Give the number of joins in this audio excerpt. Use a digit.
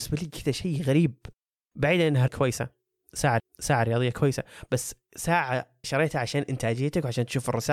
3